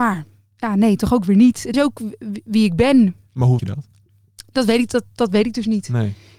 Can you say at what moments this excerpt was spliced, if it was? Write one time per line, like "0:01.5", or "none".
0:01.7
0:03.6